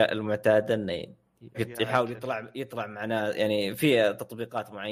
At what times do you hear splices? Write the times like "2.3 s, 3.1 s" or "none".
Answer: 1.5 s